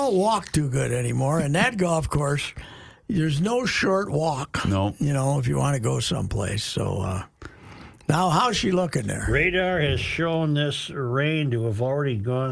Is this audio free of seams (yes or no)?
yes